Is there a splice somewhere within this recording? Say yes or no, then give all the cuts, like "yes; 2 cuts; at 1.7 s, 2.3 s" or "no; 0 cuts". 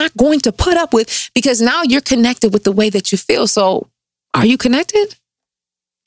no; 0 cuts